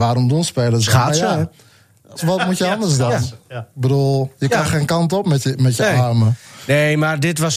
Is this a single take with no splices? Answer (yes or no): no